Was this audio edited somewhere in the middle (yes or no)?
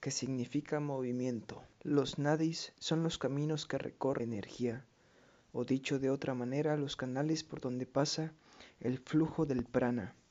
yes